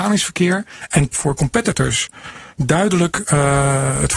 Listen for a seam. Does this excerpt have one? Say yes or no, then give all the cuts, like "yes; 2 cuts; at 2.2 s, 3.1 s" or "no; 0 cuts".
yes; 2 cuts; at 1.1 s, 2.5 s